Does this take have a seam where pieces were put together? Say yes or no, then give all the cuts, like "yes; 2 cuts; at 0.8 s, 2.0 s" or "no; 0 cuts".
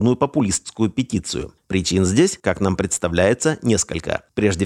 no; 0 cuts